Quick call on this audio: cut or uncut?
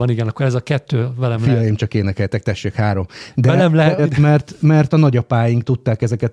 cut